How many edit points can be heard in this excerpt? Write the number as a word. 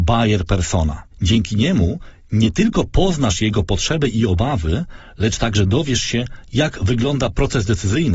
one